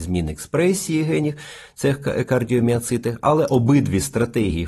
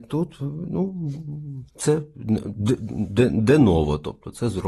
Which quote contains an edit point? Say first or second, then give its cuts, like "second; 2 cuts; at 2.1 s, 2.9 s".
second; 1 cut; at 1.7 s